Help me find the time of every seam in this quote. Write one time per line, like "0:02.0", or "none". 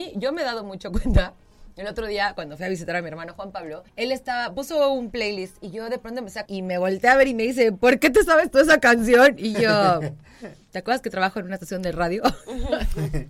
0:03.9
0:06.5
0:10.6